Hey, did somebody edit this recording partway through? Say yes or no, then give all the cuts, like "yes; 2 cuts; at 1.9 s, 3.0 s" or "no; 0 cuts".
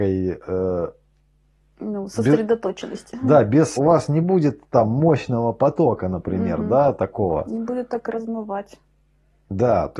yes; 1 cut; at 3.8 s